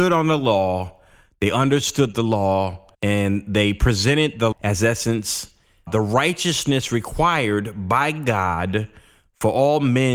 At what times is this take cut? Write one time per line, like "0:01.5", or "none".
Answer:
0:02.9
0:04.5
0:05.9